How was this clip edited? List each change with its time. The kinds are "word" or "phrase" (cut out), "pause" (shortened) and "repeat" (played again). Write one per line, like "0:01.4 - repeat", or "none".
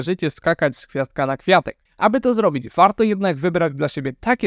0:01.9 - pause